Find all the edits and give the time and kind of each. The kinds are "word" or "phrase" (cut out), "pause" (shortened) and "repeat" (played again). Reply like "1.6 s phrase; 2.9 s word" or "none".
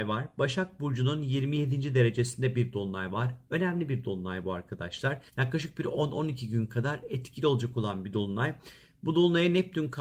5.3 s pause